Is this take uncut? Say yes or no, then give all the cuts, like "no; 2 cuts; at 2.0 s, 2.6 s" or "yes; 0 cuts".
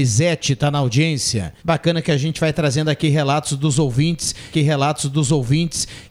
no; 2 cuts; at 1.6 s, 4.5 s